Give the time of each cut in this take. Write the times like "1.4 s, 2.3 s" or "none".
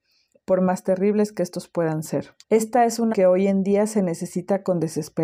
2.4 s, 3.1 s